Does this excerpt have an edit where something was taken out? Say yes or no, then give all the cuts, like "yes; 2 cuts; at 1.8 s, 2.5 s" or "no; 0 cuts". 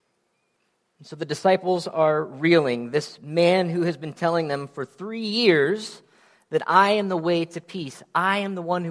no; 0 cuts